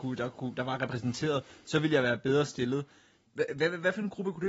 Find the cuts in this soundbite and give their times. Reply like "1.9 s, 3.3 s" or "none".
none